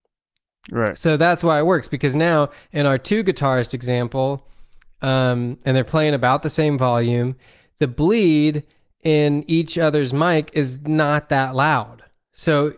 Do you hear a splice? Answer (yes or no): no